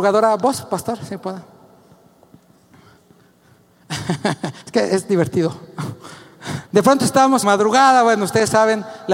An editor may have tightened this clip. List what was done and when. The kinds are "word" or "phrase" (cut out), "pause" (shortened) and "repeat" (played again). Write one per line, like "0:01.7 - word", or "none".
0:04.6 - pause
0:06.7 - pause
0:07.4 - phrase